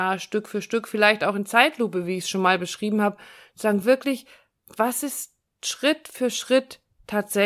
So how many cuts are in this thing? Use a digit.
0